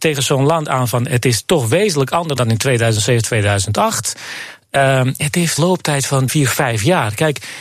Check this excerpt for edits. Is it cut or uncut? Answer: cut